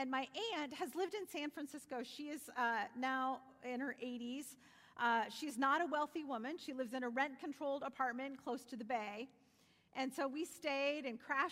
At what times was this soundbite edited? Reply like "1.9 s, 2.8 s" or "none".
none